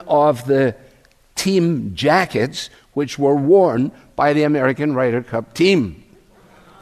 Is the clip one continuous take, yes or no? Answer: yes